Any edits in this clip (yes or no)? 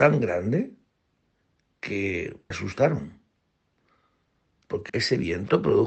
yes